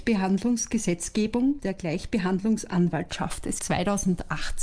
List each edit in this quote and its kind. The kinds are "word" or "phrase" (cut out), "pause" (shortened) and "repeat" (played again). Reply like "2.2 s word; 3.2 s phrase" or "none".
1.6 s word; 3.6 s word